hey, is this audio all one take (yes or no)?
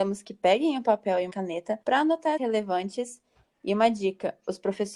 no